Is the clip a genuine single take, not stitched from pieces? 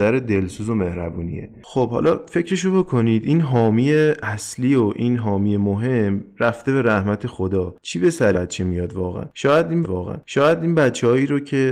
no; 2 cuts; at 8.3 s, 9.8 s

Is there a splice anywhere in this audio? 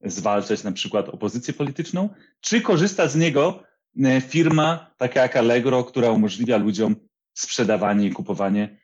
no; 0 cuts

